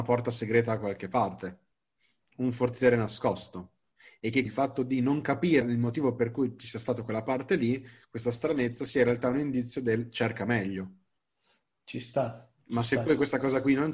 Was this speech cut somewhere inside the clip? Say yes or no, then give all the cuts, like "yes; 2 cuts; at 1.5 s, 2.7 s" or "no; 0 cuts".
yes; 2 cuts; at 4.5 s, 5.6 s